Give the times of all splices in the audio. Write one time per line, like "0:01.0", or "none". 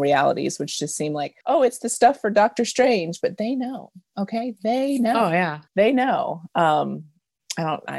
0:01.4
0:05.7